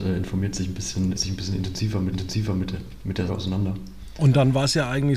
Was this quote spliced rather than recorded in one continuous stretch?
yes; 3 cuts; at 1.1 s, 2.1 s, 3.3 s

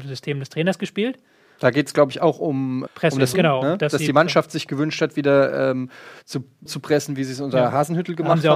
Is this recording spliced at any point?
yes; 3 cuts; at 2.9 s, 3.3 s, 6.7 s

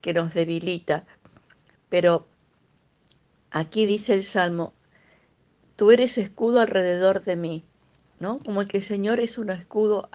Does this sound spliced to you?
no; 0 cuts

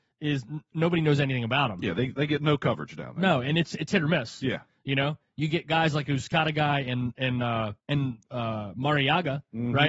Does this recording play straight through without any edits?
no; 1 cut; at 7.8 s

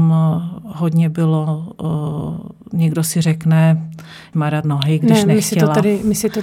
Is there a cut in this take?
yes; 2 cuts; at 4.3 s, 4.6 s

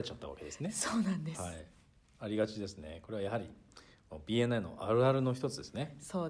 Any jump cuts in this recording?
no; 0 cuts

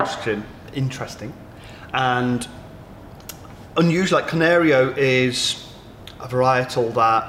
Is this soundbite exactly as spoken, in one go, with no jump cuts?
yes; 0 cuts

